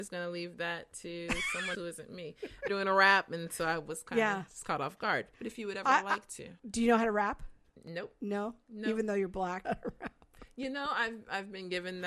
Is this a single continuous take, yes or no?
no